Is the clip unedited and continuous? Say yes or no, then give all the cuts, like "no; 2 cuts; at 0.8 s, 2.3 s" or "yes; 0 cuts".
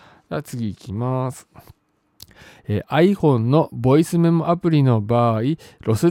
yes; 0 cuts